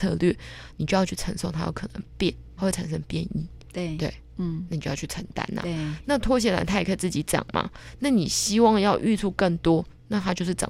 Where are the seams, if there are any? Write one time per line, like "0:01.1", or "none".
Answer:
0:02.6

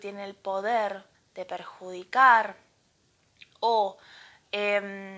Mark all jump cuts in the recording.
0:01.1

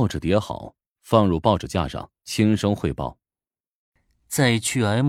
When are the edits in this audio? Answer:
0:02.2

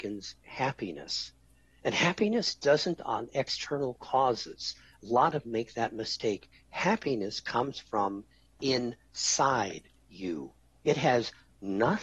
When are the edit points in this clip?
0:03.0
0:05.4

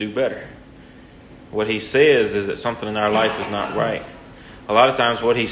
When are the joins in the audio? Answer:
none

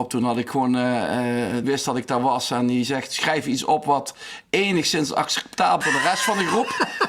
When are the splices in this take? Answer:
0:01.6
0:05.8

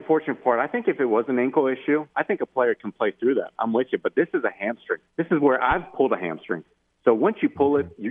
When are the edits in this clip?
0:05.1

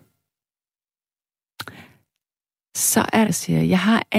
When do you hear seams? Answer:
0:03.3

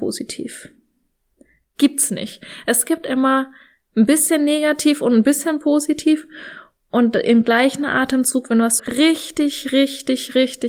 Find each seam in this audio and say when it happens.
0:08.8

